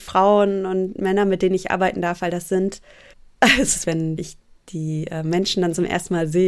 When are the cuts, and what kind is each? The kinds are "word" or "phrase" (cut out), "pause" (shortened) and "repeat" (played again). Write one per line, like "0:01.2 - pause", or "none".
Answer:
0:03.1 - pause
0:03.8 - phrase
0:04.2 - phrase